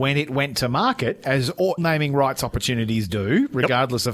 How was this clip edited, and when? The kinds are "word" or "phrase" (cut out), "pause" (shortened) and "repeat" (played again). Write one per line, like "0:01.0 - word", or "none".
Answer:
0:01.8 - phrase